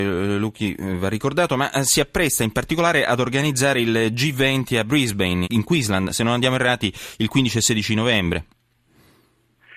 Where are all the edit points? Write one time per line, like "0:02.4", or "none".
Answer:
0:05.4